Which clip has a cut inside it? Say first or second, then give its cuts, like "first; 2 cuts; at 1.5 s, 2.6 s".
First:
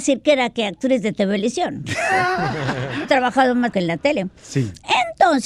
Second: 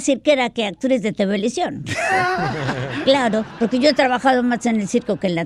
first; 2 cuts; at 3.0 s, 3.7 s